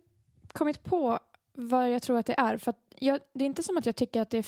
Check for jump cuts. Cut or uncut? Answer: uncut